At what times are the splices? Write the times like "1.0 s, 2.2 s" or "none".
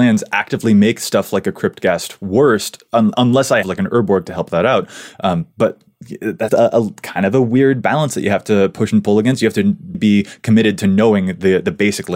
3.1 s, 3.6 s, 6.5 s, 9.9 s